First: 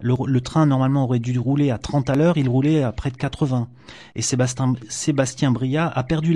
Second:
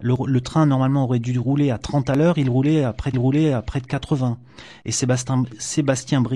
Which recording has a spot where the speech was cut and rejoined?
second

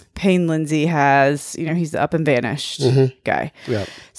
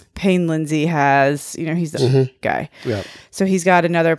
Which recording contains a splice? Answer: second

